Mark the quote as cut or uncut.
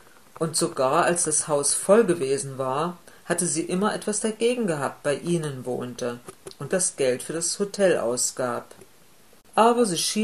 cut